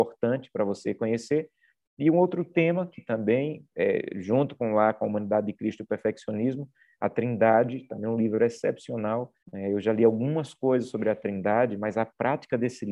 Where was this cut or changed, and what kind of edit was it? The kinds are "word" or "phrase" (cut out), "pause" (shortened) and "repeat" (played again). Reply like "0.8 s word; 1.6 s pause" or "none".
9.4 s pause